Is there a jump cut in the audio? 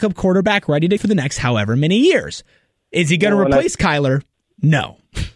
yes; 1 cut; at 1.0 s

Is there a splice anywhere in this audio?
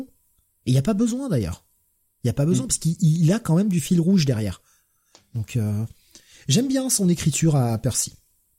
no; 0 cuts

